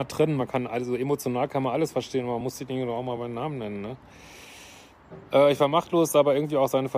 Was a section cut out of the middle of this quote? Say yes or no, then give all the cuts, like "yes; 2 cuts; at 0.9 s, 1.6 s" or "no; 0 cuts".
no; 0 cuts